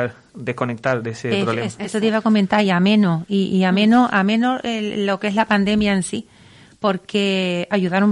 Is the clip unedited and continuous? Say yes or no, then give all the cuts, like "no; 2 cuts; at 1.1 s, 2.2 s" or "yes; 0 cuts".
yes; 0 cuts